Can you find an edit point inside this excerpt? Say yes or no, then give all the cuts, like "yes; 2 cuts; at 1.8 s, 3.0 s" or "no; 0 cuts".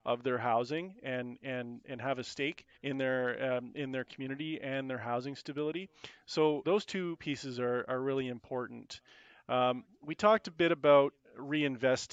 yes; 2 cuts; at 2.7 s, 6.6 s